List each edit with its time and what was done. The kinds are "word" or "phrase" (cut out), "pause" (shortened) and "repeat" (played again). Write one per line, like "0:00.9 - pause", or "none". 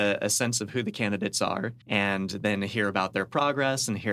0:01.8 - pause